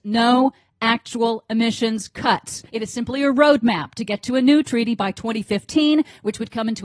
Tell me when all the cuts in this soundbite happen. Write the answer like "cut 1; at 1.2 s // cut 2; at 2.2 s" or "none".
cut 1; at 2.7 s